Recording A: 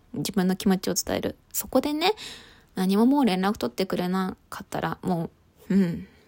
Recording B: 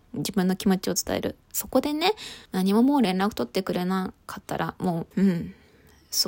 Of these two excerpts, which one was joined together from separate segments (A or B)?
B